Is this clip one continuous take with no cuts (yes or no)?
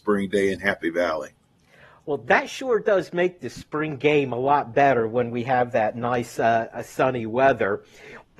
yes